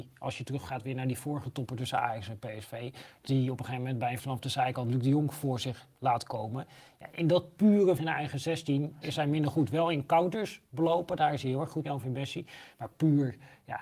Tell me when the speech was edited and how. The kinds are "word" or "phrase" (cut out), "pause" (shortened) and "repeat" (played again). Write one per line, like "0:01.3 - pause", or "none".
0:04.2 - word
0:08.0 - word
0:09.0 - word
0:11.8 - phrase